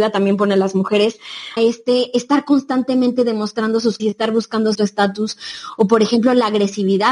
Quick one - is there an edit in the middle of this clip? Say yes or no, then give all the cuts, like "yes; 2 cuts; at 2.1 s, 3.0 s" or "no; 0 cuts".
yes; 3 cuts; at 1.6 s, 4.0 s, 4.7 s